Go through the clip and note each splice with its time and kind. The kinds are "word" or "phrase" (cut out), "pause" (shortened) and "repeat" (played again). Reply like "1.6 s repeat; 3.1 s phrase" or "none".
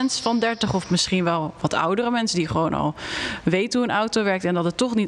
none